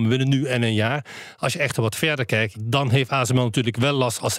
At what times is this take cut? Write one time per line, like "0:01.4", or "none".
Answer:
0:02.5